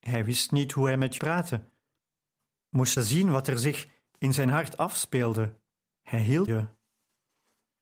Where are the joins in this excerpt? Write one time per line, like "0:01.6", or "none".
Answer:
0:01.2
0:03.0
0:05.9
0:06.5